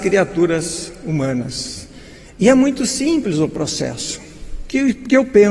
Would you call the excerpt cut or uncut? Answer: uncut